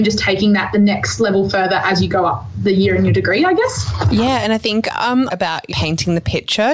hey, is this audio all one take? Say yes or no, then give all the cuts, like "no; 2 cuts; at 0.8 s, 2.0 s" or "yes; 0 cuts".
no; 2 cuts; at 5.3 s, 5.7 s